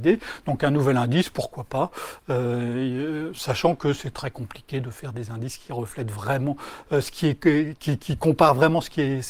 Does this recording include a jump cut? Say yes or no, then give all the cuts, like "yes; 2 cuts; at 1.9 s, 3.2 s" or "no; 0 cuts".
no; 0 cuts